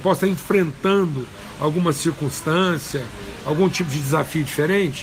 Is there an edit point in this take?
no; 0 cuts

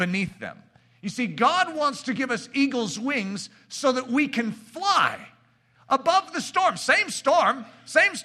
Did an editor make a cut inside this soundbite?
no; 0 cuts

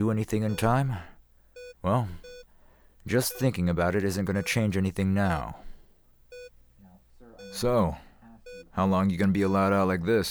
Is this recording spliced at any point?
yes; 2 cuts; at 1.7 s, 8.7 s

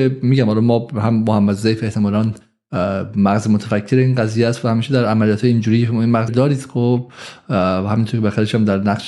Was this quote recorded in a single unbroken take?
no; 1 cut; at 6.3 s

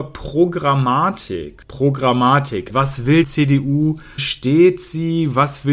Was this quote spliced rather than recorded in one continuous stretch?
yes; 3 cuts; at 2.7 s, 3.2 s, 4.2 s

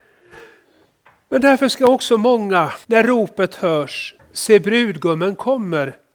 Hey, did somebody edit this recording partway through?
yes; 2 cuts; at 2.8 s, 4.2 s

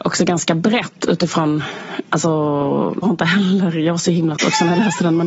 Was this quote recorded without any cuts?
no; 2 cuts; at 3.0 s, 4.4 s

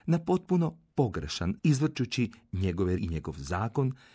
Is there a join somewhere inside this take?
yes; 2 cuts; at 1.6 s, 3.0 s

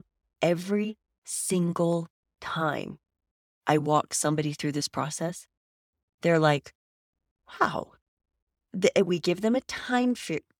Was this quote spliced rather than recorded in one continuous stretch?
no; 0 cuts

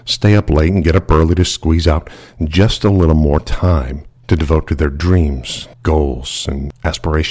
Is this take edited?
yes; 2 cuts; at 4.2 s, 5.7 s

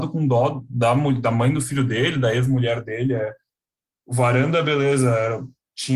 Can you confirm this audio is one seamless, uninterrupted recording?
yes; 0 cuts

